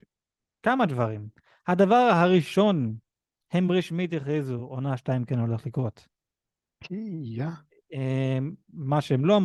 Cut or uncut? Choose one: uncut